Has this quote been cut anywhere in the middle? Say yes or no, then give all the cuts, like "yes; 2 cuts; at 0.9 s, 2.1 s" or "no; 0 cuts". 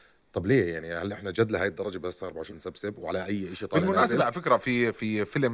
yes; 1 cut; at 2.5 s